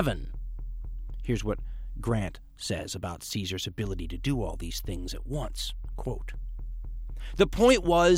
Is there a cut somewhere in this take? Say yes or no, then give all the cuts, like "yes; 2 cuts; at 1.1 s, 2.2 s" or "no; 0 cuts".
no; 0 cuts